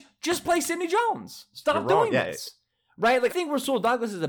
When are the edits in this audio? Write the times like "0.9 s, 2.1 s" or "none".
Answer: 3.3 s